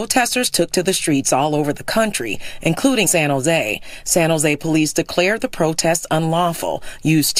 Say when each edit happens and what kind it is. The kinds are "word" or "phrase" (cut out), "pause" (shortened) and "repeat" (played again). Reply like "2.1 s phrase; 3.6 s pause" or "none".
3.1 s word